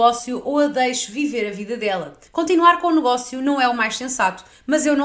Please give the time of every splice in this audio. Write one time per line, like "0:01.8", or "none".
0:02.3